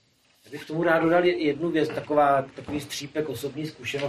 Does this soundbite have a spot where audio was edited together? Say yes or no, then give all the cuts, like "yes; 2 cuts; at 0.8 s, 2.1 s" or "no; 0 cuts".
no; 0 cuts